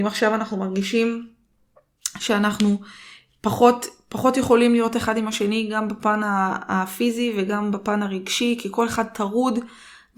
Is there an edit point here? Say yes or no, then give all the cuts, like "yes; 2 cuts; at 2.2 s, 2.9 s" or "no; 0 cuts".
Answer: no; 0 cuts